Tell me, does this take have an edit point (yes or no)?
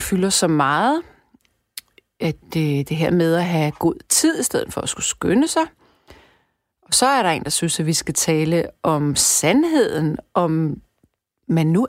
no